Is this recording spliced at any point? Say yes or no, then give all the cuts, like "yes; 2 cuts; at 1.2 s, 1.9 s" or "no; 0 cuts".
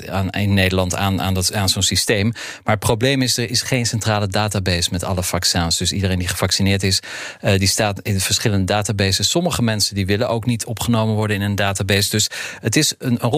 no; 0 cuts